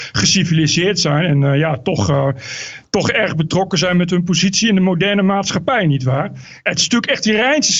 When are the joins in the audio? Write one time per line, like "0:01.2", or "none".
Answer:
none